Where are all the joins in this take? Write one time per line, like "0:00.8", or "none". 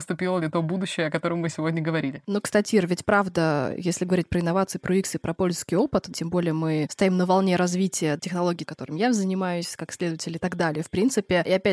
none